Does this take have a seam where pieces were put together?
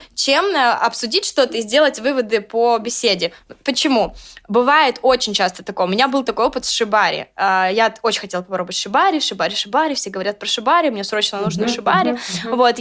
no; 0 cuts

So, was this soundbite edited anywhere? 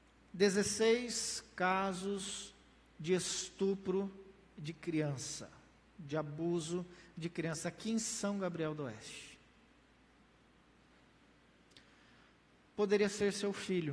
no; 0 cuts

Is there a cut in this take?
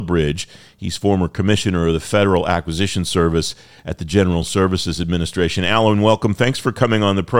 no; 0 cuts

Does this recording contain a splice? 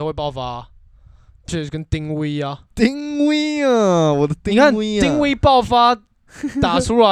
yes; 2 cuts; at 1.5 s, 2.7 s

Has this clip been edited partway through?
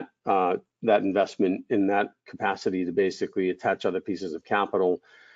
no; 0 cuts

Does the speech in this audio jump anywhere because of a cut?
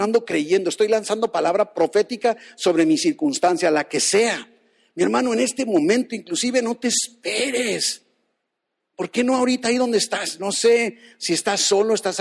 no; 0 cuts

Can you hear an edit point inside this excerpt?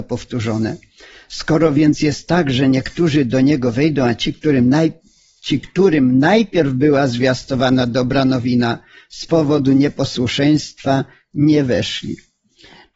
no; 0 cuts

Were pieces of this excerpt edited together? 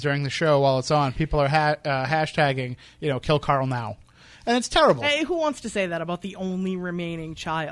no; 0 cuts

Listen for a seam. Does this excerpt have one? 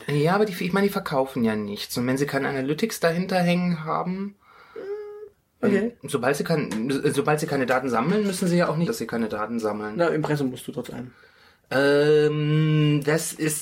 yes; 1 cut; at 8.9 s

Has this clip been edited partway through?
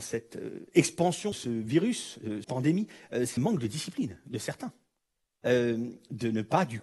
yes; 3 cuts; at 1.3 s, 2.4 s, 3.4 s

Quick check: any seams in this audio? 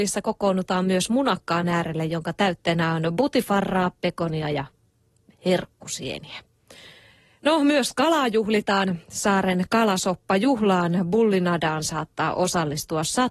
no; 0 cuts

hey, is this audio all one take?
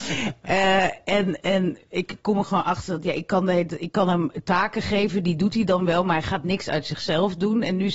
yes; 0 cuts

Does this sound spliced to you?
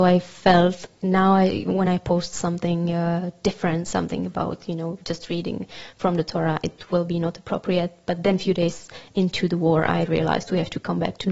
no; 0 cuts

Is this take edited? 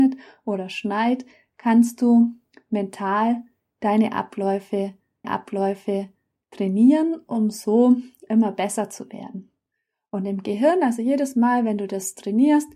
yes; 1 cut; at 5.2 s

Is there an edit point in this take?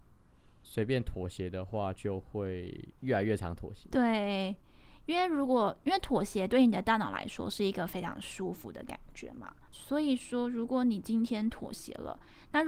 yes; 1 cut; at 3.0 s

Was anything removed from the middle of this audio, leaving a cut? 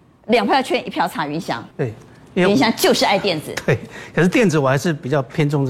yes; 1 cut; at 1.7 s

